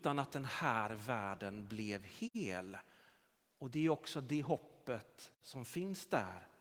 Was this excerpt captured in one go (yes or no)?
yes